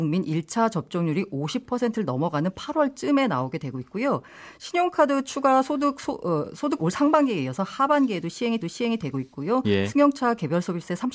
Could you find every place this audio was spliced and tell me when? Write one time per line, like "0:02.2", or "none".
0:06.8
0:08.6